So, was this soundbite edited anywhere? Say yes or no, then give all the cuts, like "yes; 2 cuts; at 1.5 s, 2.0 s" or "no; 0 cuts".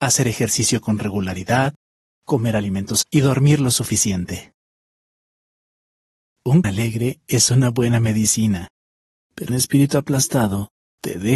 yes; 3 cuts; at 3.0 s, 6.6 s, 9.5 s